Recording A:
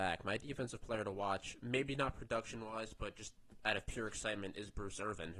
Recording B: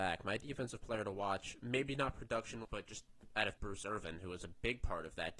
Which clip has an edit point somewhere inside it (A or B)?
B